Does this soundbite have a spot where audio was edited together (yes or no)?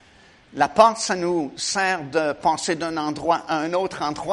no